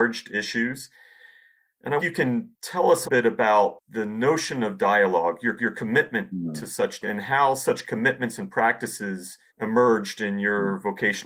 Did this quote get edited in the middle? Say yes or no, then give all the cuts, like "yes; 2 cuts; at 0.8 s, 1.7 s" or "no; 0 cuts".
yes; 6 cuts; at 2.0 s, 2.5 s, 3.0 s, 5.6 s, 7.0 s, 9.5 s